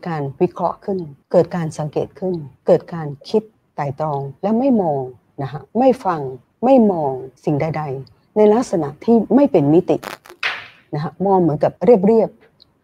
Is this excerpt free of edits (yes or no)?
no